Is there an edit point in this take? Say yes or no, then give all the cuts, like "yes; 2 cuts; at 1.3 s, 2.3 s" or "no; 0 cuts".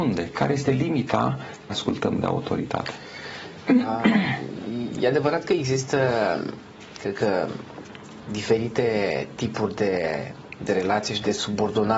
yes; 1 cut; at 1.7 s